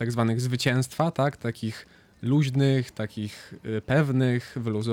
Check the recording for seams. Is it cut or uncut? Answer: uncut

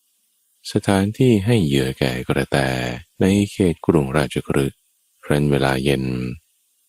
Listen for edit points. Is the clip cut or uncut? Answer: cut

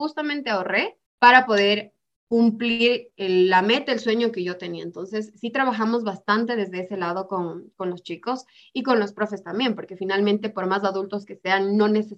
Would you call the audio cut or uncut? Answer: cut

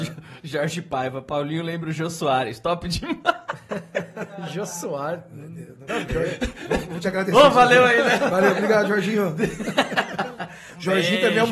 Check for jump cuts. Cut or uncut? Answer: cut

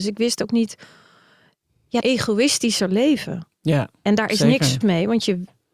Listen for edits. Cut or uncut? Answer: cut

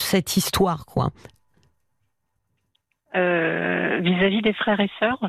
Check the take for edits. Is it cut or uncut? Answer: uncut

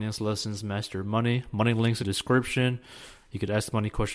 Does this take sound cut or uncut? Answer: cut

